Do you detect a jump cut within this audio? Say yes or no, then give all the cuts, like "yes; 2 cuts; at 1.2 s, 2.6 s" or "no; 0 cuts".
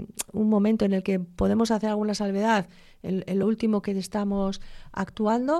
no; 0 cuts